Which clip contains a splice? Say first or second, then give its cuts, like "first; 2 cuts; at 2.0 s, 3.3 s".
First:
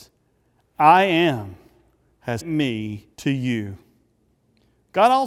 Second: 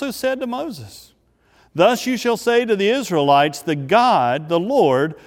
first; 2 cuts; at 2.4 s, 3.1 s